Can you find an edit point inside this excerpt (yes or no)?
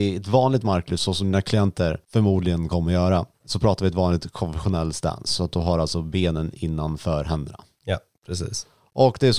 yes